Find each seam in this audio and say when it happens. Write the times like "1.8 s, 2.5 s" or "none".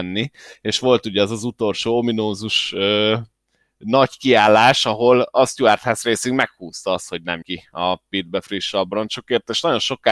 7.4 s